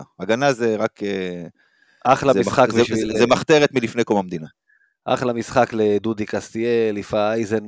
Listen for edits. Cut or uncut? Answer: uncut